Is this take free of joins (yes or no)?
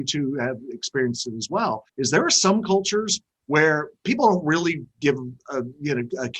no